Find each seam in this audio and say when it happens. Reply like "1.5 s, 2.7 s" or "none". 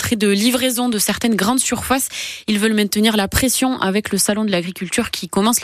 none